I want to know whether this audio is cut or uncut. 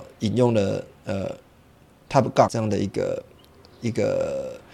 cut